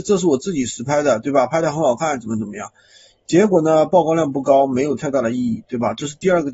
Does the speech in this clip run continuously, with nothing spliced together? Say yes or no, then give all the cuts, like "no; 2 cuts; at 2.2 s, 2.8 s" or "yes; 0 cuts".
yes; 0 cuts